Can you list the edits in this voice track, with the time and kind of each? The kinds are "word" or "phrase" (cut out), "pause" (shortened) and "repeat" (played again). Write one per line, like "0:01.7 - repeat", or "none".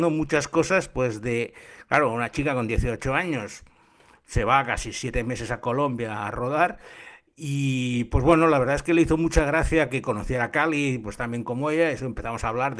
none